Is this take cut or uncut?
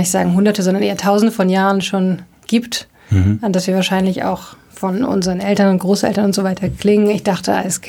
uncut